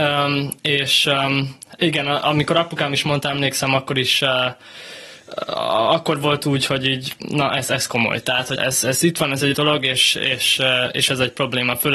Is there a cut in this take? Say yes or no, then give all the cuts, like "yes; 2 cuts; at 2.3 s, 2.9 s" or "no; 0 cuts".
yes; 2 cuts; at 8.6 s, 9.5 s